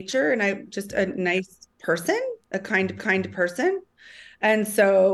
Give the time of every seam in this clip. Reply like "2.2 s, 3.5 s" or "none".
1.7 s, 3.0 s